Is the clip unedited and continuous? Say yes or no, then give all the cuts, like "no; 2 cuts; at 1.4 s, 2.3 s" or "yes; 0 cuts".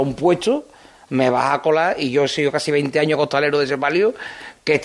yes; 0 cuts